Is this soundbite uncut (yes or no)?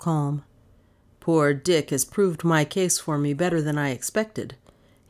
yes